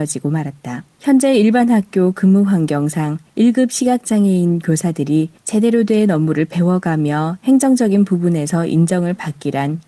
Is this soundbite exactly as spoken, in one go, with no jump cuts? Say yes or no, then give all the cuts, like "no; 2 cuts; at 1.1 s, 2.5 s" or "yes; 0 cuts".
no; 3 cuts; at 0.9 s, 3.3 s, 5.4 s